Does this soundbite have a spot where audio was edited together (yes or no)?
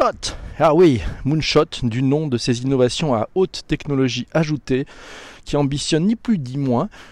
no